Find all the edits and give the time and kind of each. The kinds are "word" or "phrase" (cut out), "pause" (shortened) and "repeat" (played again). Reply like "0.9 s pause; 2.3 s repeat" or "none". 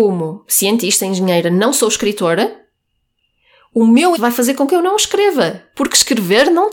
4.2 s word